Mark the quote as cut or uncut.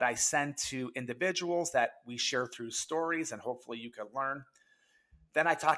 uncut